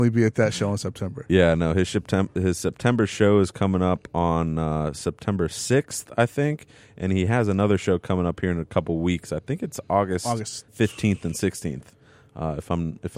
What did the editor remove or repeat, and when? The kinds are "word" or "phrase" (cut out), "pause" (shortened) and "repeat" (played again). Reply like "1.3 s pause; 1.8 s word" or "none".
10.7 s pause